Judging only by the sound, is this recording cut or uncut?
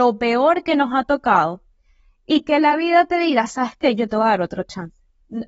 uncut